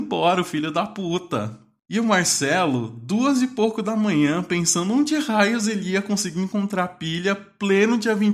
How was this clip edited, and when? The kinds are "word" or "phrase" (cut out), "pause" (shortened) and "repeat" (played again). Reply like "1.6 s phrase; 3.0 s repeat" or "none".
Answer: none

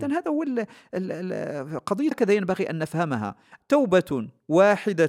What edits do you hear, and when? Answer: 2.1 s word; 3.6 s word

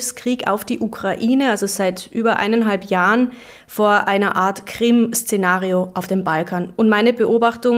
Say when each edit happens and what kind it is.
none

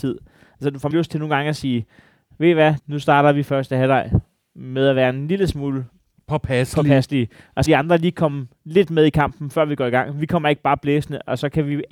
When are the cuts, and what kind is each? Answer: 0.9 s word; 2.8 s word; 7.7 s word

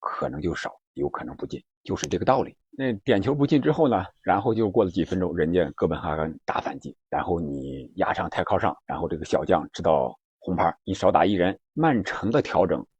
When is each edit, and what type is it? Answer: 1.7 s pause; 2.6 s pause; 7.0 s pause; 8.8 s pause; 10.8 s pause; 11.6 s pause

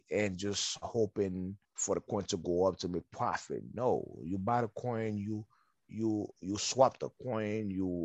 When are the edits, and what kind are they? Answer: 1.6 s pause; 6.3 s pause

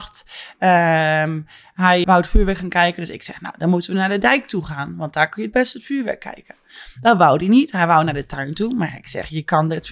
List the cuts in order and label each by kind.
2.0 s word

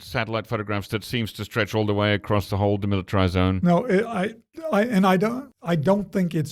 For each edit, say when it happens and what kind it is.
none

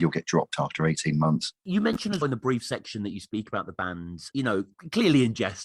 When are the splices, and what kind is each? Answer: 2.2 s word; 4.3 s word

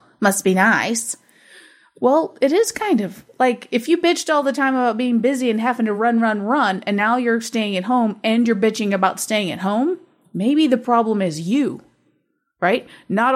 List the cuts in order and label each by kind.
none

